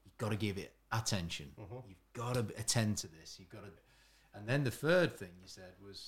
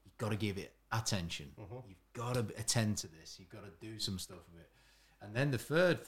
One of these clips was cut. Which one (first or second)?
first